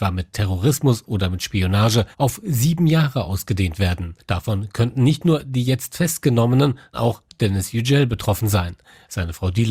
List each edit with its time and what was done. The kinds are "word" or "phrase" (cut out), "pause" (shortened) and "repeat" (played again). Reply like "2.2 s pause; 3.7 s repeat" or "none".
2.1 s pause; 4.2 s pause; 6.9 s word